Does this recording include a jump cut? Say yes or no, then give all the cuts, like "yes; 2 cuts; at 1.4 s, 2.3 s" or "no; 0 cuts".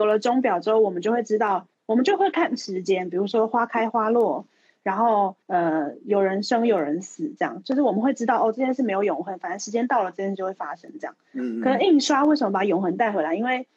yes; 1 cut; at 5.4 s